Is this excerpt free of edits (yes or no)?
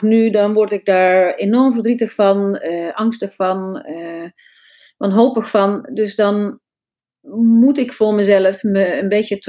yes